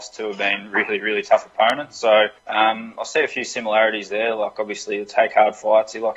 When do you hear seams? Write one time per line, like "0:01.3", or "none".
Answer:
0:02.4